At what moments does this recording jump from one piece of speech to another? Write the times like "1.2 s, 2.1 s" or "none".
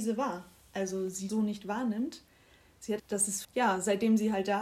1.3 s, 3.0 s, 3.4 s